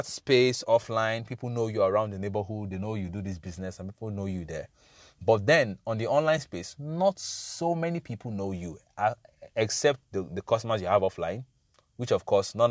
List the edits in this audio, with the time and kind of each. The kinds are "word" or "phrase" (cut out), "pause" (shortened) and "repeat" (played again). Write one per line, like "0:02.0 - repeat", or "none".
none